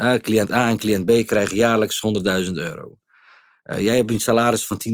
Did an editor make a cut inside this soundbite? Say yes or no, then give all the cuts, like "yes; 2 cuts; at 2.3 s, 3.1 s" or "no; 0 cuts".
no; 0 cuts